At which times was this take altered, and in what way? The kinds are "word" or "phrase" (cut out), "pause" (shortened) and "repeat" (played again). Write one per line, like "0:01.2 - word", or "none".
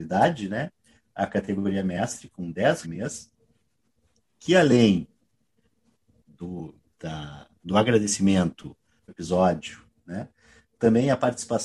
0:02.8 - phrase
0:07.6 - pause
0:09.1 - phrase

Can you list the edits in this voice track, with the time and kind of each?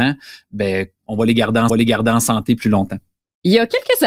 0:01.0 - phrase
0:01.7 - repeat

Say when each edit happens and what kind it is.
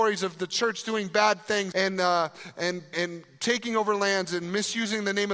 0:01.7 - word
0:02.9 - word

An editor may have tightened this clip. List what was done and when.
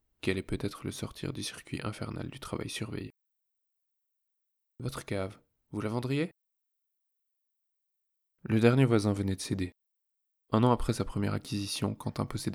none

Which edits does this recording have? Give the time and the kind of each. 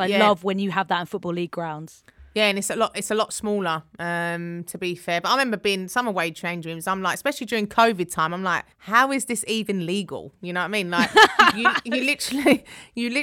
0:08.7 - pause

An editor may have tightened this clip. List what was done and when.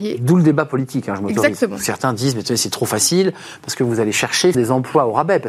0:04.5 - word

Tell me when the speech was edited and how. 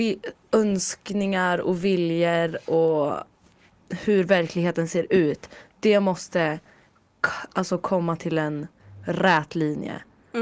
none

